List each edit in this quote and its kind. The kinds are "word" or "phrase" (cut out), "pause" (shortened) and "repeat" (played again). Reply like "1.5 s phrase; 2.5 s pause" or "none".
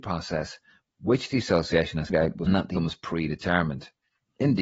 2.1 s word; 2.5 s phrase; 2.8 s word